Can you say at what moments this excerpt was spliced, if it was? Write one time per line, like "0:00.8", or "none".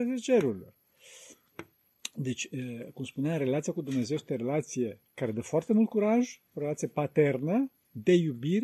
0:05.1